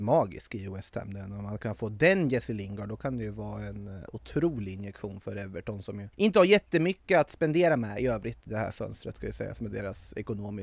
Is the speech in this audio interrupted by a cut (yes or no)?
yes